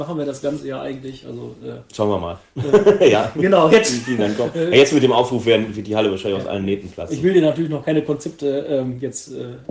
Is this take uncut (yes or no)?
yes